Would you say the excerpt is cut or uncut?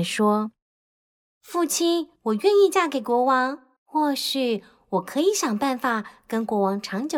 cut